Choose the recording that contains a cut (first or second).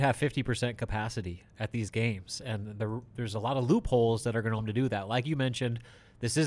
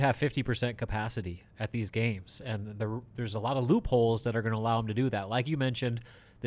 first